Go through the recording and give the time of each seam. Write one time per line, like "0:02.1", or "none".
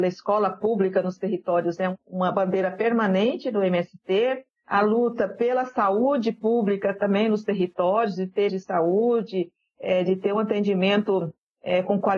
0:08.5